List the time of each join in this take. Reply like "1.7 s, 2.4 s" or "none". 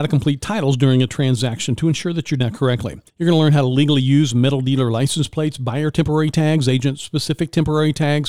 2.4 s, 3.1 s